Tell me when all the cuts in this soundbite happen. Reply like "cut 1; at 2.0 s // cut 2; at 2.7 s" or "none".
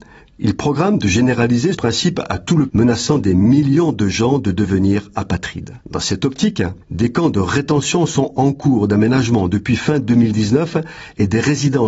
cut 1; at 1.7 s // cut 2; at 2.7 s // cut 3; at 5.8 s // cut 4; at 6.8 s

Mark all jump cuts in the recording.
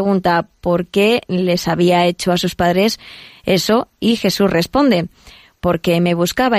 none

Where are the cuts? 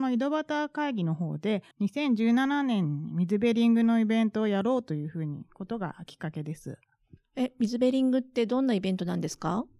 cut 1; at 1.7 s

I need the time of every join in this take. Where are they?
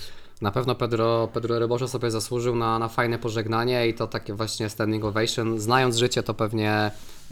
none

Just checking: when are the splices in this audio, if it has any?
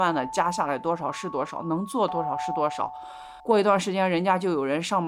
cut 1; at 3.4 s

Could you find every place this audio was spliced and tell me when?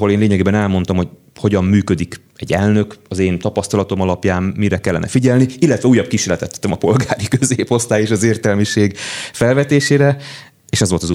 none

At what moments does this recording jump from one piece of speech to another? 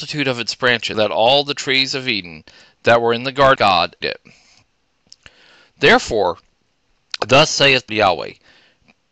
cut 1; at 0.9 s // cut 2; at 3.6 s // cut 3; at 4.0 s // cut 4; at 7.9 s

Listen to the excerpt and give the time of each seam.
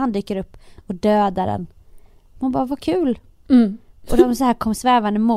none

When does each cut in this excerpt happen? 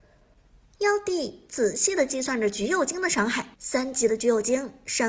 cut 1; at 3.5 s

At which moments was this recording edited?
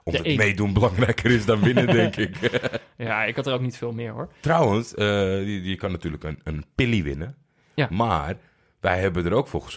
none

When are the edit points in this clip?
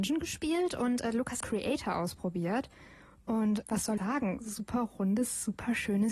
cut 1; at 1.4 s // cut 2; at 3.6 s // cut 3; at 4.0 s

